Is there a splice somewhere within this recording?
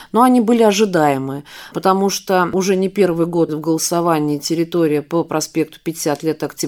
yes; 1 cut; at 3.5 s

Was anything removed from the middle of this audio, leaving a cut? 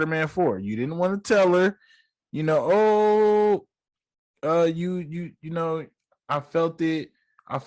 no; 0 cuts

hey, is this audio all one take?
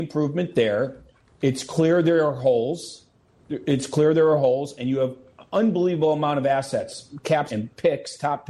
no; 1 cut; at 7.5 s

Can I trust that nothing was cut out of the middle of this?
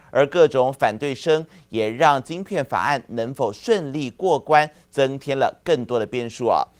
yes; 0 cuts

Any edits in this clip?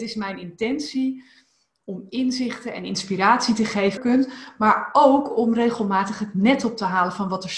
yes; 1 cut; at 4.0 s

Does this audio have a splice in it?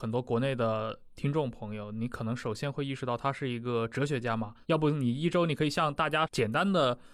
yes; 1 cut; at 4.6 s

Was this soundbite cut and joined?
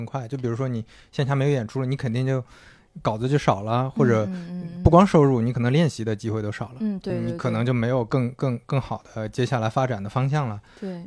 no; 0 cuts

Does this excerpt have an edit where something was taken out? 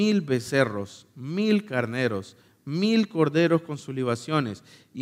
no; 0 cuts

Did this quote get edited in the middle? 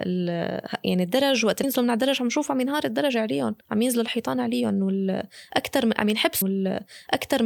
yes; 3 cuts; at 1.6 s, 3.6 s, 6.4 s

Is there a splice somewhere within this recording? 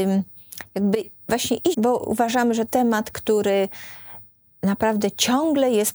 yes; 2 cuts; at 1.7 s, 2.7 s

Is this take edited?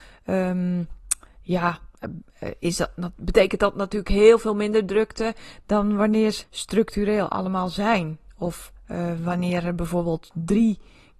yes; 1 cut; at 6.4 s

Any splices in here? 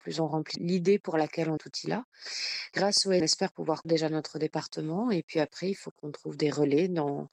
yes; 3 cuts; at 1.6 s, 3.2 s, 3.8 s

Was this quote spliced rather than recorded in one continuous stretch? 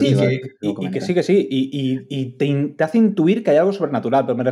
no; 0 cuts

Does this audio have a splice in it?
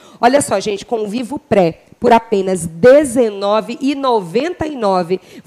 no; 0 cuts

